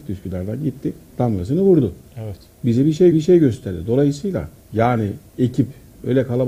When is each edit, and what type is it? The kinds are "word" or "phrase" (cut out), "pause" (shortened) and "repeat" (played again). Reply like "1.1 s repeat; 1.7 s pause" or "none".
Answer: 1.1 s pause; 3.1 s repeat; 4.6 s pause

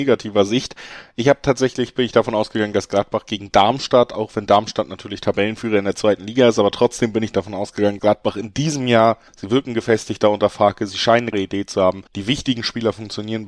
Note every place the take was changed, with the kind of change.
8.0 s word; 9.3 s pause; 11.3 s word; 12.1 s pause

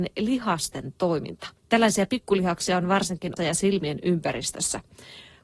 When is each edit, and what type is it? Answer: 1.6 s pause; 3.4 s word

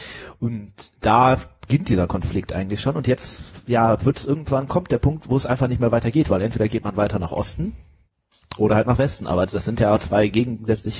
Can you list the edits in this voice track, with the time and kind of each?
none

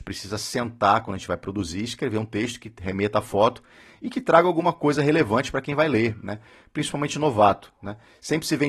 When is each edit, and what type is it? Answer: none

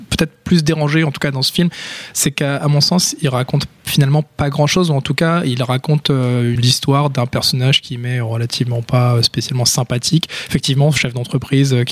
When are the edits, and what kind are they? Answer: 6.6 s word

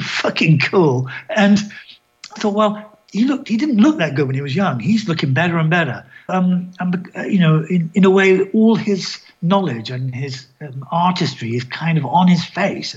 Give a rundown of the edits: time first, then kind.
2.4 s word; 6.3 s word

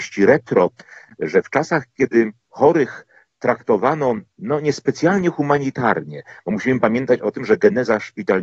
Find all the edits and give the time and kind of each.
none

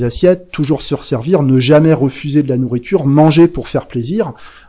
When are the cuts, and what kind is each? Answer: none

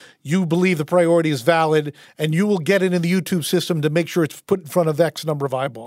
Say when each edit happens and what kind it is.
none

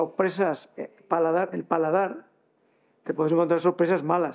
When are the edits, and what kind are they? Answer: 1.5 s word

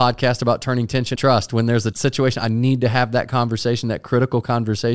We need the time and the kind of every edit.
1.2 s word; 1.9 s word

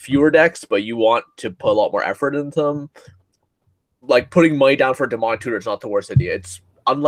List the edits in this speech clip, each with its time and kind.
none

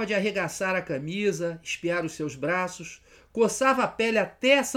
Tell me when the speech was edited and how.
none

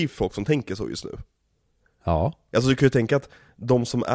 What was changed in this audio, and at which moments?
none

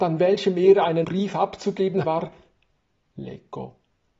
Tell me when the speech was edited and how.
1.0 s word; 2.0 s word

